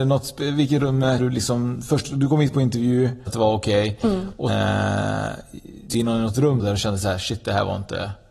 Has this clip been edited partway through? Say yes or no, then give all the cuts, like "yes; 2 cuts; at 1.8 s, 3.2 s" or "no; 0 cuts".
yes; 5 cuts; at 1.2 s, 3.3 s, 4.5 s, 5.9 s, 6.6 s